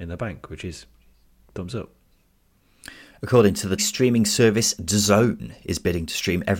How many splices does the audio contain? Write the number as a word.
one